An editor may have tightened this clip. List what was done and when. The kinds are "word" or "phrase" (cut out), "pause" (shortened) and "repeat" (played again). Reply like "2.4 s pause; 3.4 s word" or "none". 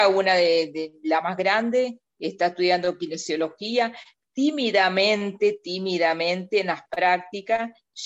none